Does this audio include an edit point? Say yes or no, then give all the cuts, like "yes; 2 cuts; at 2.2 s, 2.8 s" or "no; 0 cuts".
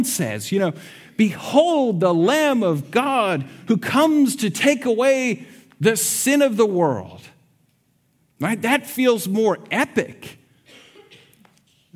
no; 0 cuts